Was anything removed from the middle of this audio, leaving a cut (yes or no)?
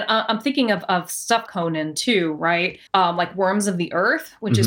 yes